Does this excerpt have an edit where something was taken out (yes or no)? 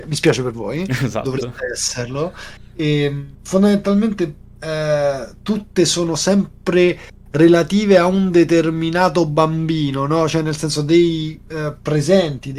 yes